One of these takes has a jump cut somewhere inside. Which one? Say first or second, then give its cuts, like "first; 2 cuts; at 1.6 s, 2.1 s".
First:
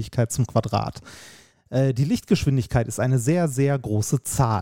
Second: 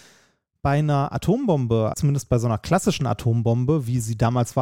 second; 1 cut; at 1.9 s